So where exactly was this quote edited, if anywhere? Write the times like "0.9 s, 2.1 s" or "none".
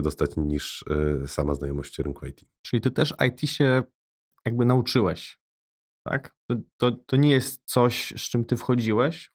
none